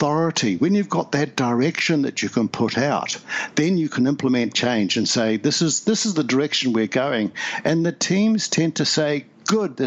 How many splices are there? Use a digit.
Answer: 0